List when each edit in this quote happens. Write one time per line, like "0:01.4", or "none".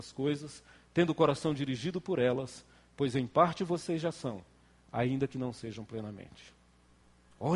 none